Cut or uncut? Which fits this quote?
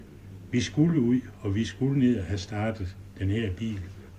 uncut